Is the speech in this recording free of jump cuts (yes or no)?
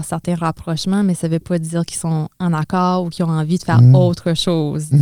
yes